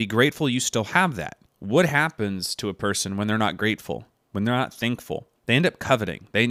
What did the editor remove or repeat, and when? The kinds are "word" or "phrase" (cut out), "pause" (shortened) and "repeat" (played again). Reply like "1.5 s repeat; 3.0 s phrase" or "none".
1.5 s pause; 5.4 s pause